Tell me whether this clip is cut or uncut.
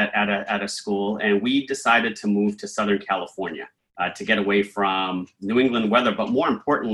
cut